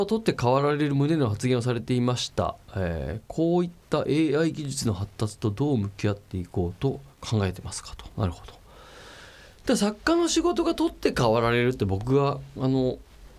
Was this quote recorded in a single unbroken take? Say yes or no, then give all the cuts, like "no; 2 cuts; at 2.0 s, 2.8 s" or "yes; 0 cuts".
no; 2 cuts; at 2.6 s, 7.1 s